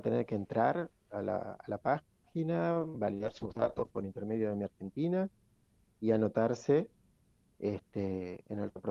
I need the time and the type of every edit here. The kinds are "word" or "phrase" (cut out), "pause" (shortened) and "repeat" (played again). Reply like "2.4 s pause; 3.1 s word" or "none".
none